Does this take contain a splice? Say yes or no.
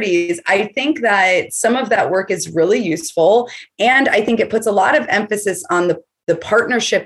no